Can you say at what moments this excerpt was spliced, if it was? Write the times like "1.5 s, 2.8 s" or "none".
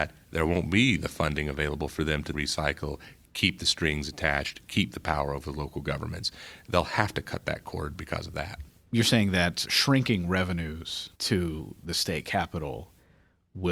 2.3 s, 9.7 s, 11.1 s